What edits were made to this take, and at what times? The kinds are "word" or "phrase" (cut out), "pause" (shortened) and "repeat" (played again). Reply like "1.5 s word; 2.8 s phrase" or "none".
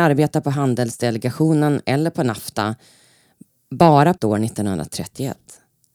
4.2 s word

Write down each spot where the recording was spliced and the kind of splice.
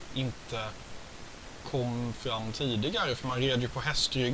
none

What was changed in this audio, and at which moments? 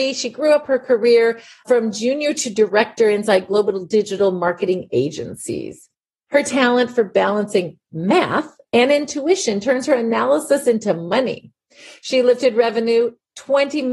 none

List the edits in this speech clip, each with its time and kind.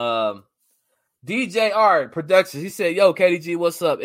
none

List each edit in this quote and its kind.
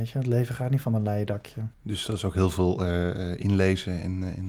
1.7 s pause

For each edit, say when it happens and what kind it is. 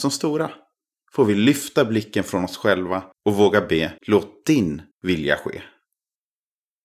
3.1 s pause; 4.0 s pause; 4.9 s pause

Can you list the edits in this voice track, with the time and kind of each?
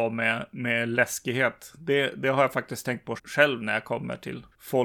3.2 s word

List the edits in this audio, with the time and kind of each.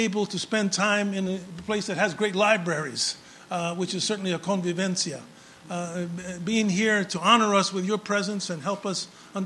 none

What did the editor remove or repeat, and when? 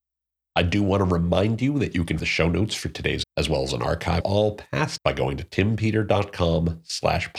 2.2 s word; 3.2 s word; 4.2 s word; 5.0 s word

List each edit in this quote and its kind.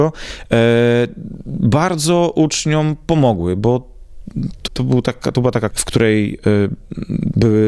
4.7 s word; 5.7 s word

